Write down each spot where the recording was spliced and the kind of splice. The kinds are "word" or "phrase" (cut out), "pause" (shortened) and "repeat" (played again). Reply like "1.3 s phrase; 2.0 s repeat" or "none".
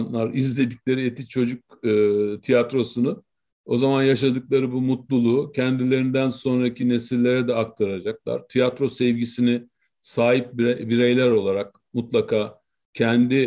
none